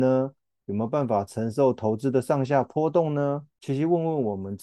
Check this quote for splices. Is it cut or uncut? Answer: uncut